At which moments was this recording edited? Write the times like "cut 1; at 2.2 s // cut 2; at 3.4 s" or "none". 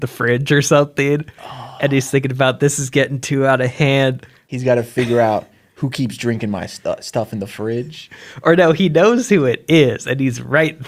none